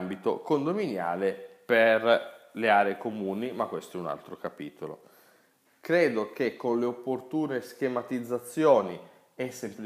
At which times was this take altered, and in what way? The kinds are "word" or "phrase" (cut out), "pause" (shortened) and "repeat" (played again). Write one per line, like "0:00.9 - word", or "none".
none